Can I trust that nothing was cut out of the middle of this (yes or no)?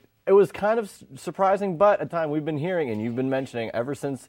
no